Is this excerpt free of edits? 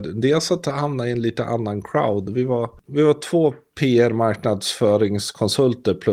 yes; 0 cuts

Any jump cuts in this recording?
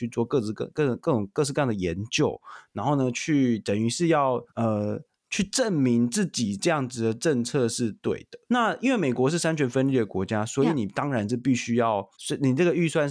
yes; 3 cuts; at 4.5 s, 8.4 s, 12.1 s

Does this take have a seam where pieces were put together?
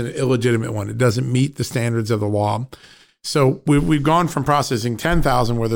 no; 0 cuts

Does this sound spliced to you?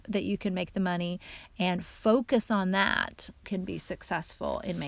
yes; 1 cut; at 3.4 s

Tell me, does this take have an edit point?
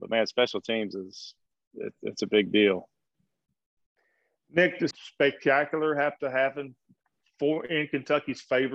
yes; 1 cut; at 4.9 s

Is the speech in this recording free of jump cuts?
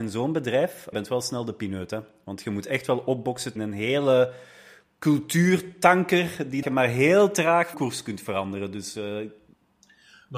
no; 4 cuts; at 0.9 s, 3.6 s, 6.6 s, 7.7 s

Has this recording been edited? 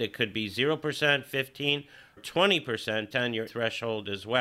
yes; 3 cuts; at 2.2 s, 3.1 s, 3.5 s

